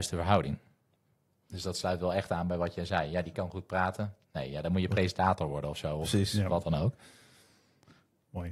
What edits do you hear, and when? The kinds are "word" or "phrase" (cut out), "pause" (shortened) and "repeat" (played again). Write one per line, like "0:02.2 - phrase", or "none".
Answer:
none